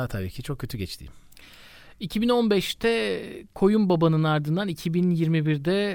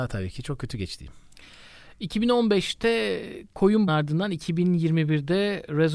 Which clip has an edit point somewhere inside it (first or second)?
second